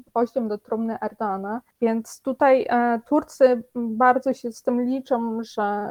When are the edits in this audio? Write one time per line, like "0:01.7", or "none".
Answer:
none